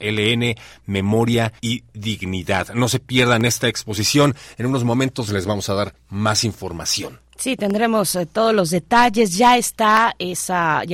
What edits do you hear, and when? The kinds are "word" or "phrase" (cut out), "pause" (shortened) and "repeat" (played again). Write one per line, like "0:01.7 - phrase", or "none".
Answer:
0:01.6 - pause
0:05.3 - word